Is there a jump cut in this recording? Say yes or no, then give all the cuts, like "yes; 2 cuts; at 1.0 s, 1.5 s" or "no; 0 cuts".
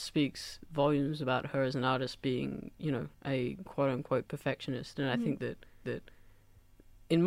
yes; 1 cut; at 5.8 s